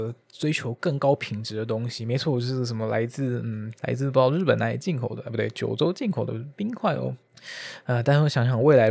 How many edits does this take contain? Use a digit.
0